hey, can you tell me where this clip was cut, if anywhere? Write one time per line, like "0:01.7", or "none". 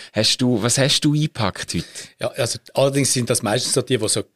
none